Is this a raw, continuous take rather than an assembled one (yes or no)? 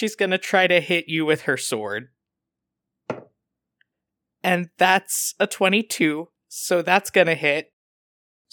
yes